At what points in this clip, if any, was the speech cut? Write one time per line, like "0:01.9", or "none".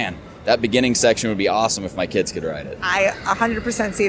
0:02.8